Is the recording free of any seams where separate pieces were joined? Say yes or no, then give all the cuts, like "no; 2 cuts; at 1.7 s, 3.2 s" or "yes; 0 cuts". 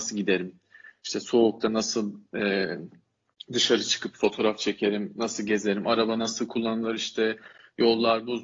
yes; 0 cuts